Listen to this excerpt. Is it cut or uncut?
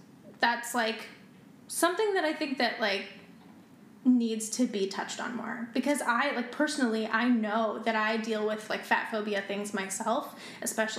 uncut